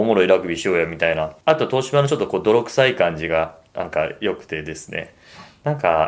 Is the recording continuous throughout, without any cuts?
no; 1 cut; at 1.4 s

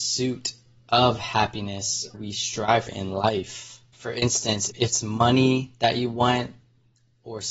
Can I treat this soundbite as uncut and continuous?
no; 3 cuts; at 2.1 s, 2.9 s, 4.7 s

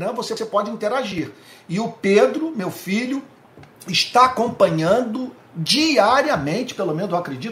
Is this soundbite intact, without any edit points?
no; 1 cut; at 3.7 s

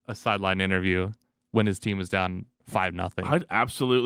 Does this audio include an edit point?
no; 0 cuts

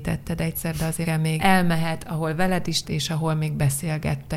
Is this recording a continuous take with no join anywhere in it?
no; 3 cuts; at 1.0 s, 1.4 s, 2.8 s

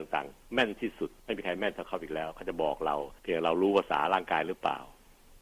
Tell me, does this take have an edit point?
yes; 2 cuts; at 1.2 s, 3.2 s

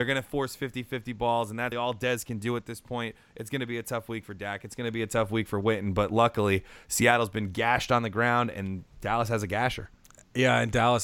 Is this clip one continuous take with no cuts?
no; 2 cuts; at 1.7 s, 8.9 s

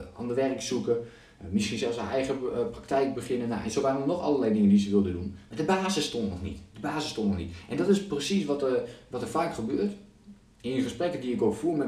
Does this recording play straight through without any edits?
yes; 0 cuts

